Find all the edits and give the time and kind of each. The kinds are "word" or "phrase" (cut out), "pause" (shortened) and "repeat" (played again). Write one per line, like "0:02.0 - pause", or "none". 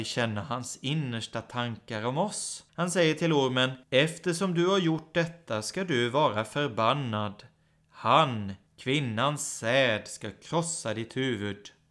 0:02.7 - pause
0:03.8 - pause
0:08.7 - pause